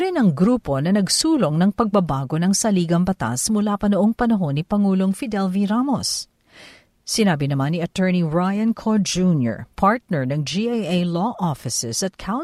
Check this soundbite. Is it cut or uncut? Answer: uncut